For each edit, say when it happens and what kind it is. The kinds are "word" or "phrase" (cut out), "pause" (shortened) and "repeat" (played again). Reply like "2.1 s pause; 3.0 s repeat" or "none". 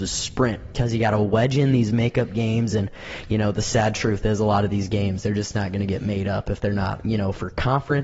none